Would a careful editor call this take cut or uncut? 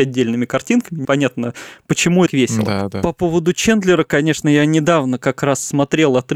cut